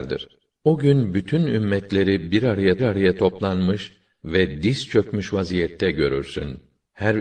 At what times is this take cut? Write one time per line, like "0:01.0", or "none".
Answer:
0:02.8